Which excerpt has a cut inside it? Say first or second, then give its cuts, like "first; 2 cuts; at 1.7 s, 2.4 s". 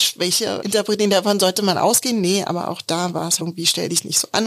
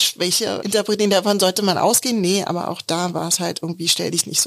first; 1 cut; at 3.4 s